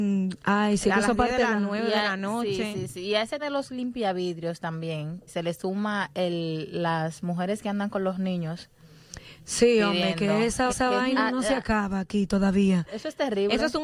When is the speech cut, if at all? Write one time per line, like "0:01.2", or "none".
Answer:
0:01.6
0:03.4
0:05.3
0:10.7